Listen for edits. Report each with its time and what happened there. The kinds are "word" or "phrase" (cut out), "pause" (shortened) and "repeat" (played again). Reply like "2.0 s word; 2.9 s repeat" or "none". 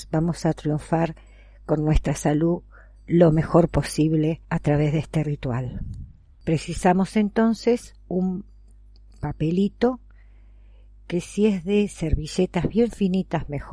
4.4 s pause